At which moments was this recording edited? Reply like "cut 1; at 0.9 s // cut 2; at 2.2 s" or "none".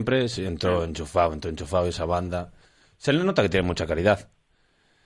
none